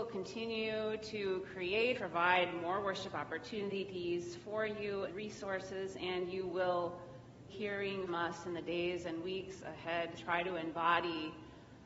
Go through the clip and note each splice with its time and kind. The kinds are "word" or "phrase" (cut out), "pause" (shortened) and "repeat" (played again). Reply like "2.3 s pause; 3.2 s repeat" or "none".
1.9 s word; 5.1 s word; 7.5 s word; 8.1 s word; 10.2 s phrase